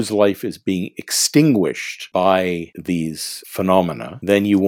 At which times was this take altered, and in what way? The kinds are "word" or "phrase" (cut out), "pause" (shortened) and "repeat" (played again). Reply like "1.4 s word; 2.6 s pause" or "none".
3.4 s word